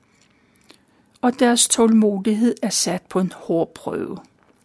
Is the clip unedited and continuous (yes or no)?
yes